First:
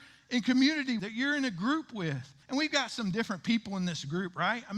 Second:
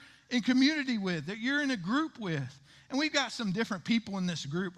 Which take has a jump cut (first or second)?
first